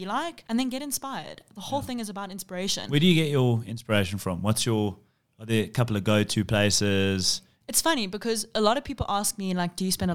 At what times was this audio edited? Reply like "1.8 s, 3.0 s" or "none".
none